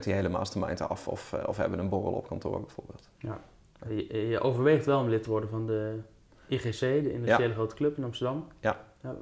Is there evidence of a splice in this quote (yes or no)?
no